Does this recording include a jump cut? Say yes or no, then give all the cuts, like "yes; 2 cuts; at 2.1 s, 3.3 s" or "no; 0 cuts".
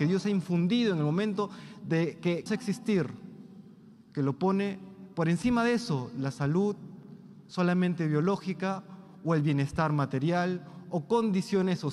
yes; 1 cut; at 2.5 s